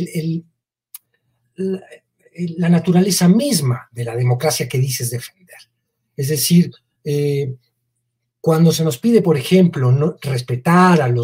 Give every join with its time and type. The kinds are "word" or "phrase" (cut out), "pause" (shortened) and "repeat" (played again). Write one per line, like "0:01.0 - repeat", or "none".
none